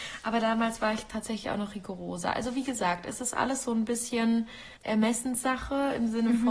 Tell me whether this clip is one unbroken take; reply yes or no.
no